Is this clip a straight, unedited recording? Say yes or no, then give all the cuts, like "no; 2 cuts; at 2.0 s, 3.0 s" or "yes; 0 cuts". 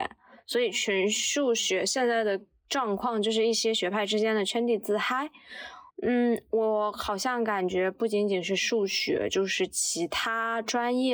no; 1 cut; at 5.9 s